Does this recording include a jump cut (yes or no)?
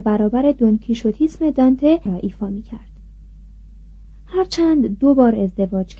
yes